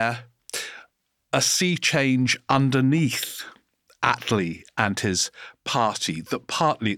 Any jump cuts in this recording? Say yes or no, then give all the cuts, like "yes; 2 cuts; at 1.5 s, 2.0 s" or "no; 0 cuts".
no; 0 cuts